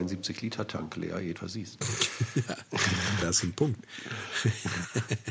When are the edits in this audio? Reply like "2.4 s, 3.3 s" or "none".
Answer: 1.4 s, 3.2 s

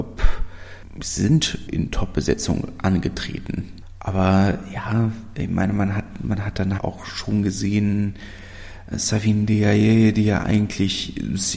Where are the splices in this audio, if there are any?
1.7 s, 6.8 s, 8.9 s

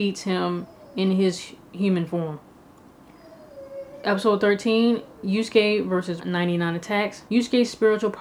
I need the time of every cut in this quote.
5.1 s, 6.2 s, 7.3 s

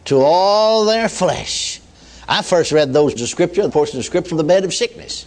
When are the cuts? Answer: 1.9 s, 3.2 s, 3.7 s, 4.3 s

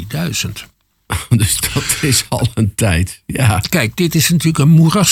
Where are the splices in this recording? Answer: none

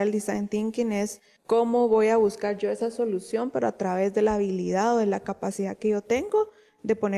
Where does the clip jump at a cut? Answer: none

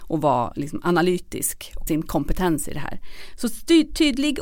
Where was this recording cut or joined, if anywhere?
1.9 s

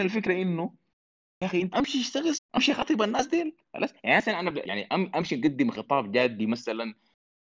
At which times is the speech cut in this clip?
1.7 s, 2.3 s, 3.6 s, 4.6 s

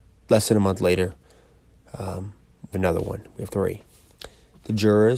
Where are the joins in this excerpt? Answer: 2.7 s, 3.5 s

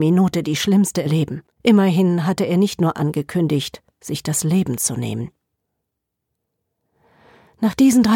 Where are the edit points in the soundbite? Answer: 1.1 s, 1.5 s, 2.9 s

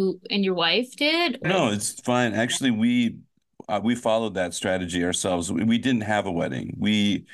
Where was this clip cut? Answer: 1.4 s

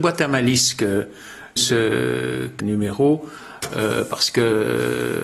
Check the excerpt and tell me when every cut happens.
1.6 s, 2.6 s

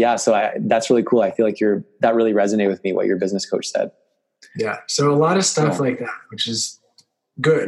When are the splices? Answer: none

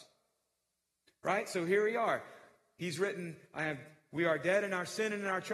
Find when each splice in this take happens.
none

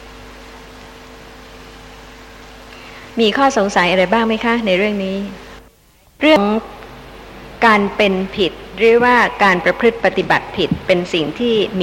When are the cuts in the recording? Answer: 3.1 s, 5.7 s

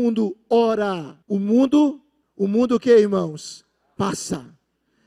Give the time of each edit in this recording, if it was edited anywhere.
1.2 s, 2.2 s

